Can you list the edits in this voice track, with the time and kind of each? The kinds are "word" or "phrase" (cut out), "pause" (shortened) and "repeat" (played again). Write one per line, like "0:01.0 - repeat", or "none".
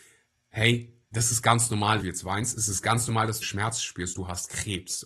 0:01.0 - pause
0:02.0 - word
0:03.4 - word